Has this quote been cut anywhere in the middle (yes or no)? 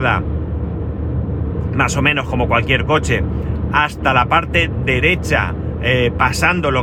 no